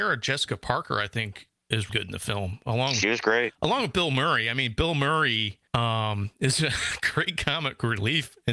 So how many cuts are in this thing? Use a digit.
2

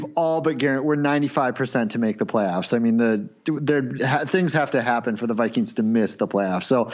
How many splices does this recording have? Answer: 0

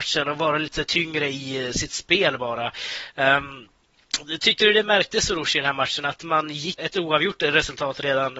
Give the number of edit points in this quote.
1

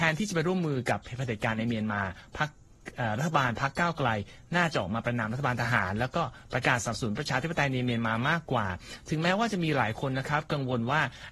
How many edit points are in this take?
0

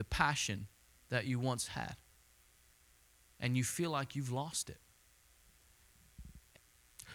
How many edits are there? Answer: 0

